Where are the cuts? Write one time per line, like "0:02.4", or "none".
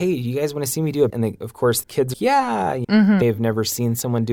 0:01.1
0:01.8
0:02.1
0:02.8
0:03.2